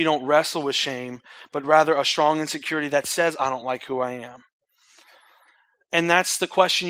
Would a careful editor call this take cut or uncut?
uncut